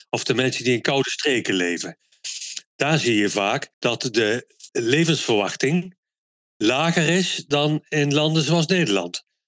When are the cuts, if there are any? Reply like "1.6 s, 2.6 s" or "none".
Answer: 3.7 s, 4.7 s